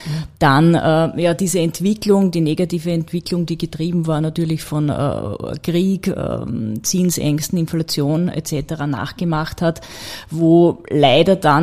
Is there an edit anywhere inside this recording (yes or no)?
no